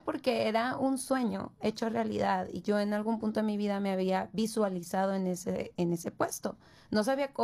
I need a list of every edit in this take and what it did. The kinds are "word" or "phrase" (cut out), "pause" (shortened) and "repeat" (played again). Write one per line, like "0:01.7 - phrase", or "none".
0:02.6 - word